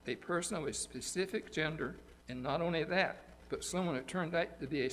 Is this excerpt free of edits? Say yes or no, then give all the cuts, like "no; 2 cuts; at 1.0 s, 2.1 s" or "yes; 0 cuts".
no; 1 cut; at 2.2 s